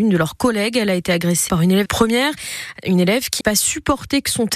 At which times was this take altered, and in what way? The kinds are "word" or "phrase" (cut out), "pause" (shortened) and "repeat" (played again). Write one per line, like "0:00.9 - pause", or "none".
0:01.5 - word
0:01.9 - word
0:03.4 - word